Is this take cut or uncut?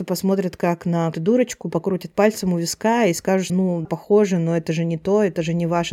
cut